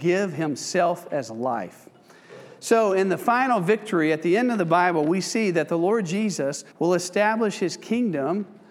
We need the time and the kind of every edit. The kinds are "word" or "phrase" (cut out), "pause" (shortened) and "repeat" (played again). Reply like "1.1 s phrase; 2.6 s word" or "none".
6.7 s pause